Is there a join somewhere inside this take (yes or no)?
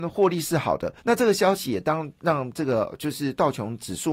yes